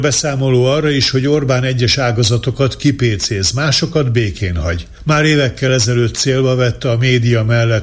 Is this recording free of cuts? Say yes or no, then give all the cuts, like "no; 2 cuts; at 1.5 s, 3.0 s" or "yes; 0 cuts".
yes; 0 cuts